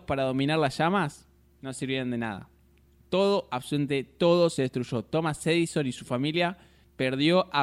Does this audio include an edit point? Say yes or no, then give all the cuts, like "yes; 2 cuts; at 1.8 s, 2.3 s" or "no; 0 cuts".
no; 0 cuts